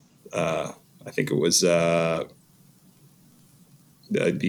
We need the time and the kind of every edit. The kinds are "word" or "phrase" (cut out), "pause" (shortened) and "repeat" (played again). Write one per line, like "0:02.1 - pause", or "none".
none